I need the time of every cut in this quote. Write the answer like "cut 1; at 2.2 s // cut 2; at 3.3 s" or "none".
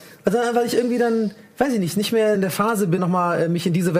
cut 1; at 2.3 s // cut 2; at 3.0 s